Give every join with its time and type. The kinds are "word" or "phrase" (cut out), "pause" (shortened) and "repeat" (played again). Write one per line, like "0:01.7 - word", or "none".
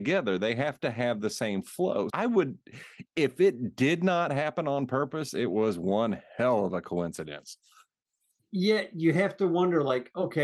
0:02.1 - word